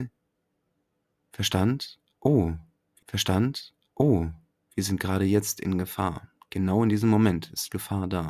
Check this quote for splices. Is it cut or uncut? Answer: cut